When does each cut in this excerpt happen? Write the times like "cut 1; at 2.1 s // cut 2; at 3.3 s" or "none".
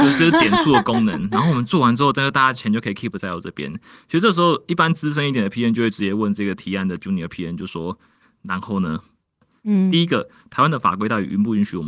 none